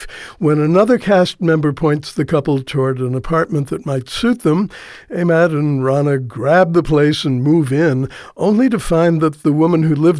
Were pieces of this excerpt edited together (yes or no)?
no